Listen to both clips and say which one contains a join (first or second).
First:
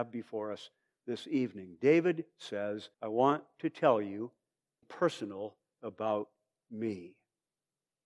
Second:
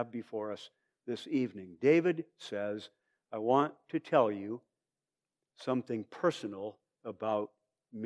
first